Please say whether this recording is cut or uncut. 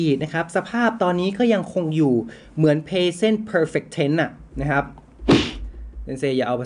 uncut